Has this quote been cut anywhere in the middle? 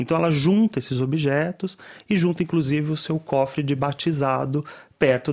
no; 0 cuts

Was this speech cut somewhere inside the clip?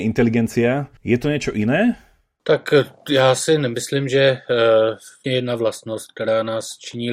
yes; 2 cuts; at 1.0 s, 5.2 s

